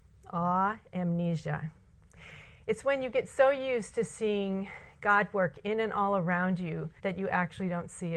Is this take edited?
yes; 1 cut; at 7.0 s

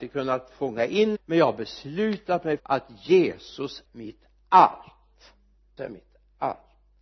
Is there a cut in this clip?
yes; 4 cuts; at 1.1 s, 2.6 s, 3.8 s, 5.8 s

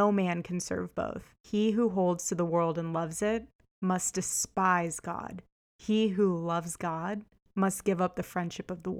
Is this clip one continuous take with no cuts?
yes; 0 cuts

